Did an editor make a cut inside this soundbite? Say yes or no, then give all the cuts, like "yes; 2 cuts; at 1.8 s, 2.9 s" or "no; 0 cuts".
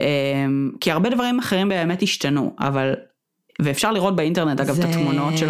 no; 0 cuts